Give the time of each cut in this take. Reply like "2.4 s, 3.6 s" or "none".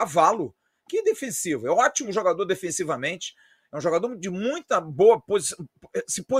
none